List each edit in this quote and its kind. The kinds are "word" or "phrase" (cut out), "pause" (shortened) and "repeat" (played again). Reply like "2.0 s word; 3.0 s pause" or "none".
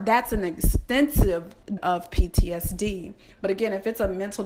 1.8 s word